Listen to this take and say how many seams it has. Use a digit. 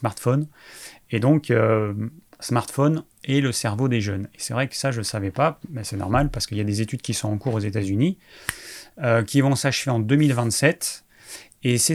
0